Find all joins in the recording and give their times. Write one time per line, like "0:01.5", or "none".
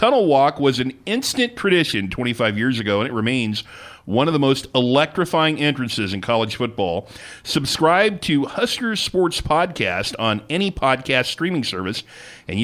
none